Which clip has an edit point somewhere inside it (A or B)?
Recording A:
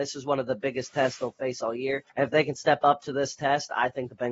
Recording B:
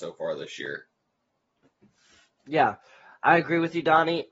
A